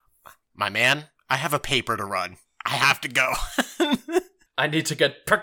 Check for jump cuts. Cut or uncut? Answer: uncut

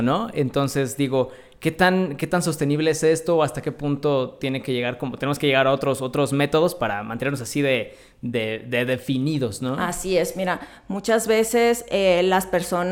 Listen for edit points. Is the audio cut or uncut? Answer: uncut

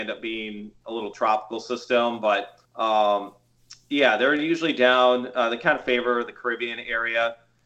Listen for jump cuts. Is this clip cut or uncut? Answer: cut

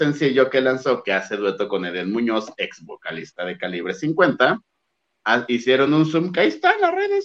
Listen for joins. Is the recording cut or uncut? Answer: uncut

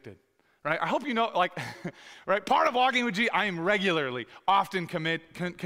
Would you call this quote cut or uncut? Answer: uncut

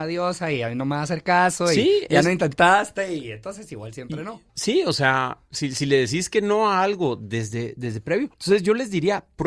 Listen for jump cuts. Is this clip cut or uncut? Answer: cut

